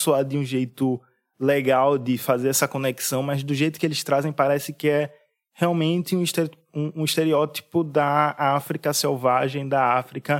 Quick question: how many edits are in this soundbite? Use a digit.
0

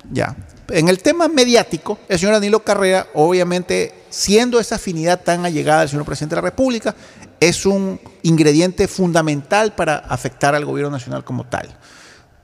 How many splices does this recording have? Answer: 2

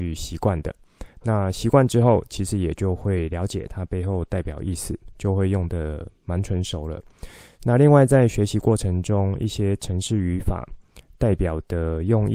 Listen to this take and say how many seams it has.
1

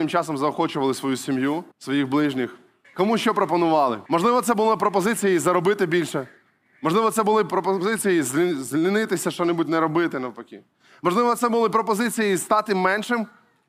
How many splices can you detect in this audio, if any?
3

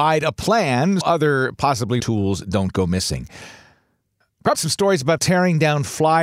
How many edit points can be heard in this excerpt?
4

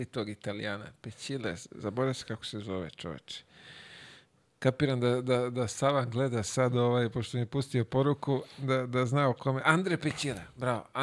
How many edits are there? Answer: 0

